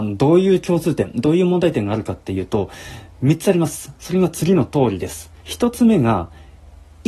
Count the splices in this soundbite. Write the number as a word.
one